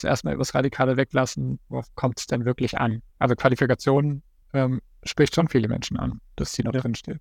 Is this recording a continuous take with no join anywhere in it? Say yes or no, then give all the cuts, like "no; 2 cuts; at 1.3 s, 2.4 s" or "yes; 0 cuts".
no; 2 cuts; at 3.1 s, 4.4 s